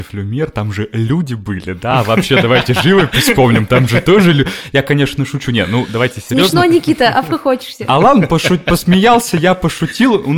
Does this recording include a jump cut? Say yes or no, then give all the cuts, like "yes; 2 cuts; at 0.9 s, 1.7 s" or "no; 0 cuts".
no; 0 cuts